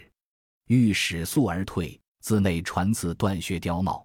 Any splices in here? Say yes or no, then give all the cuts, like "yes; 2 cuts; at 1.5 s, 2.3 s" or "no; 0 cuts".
yes; 1 cut; at 2.1 s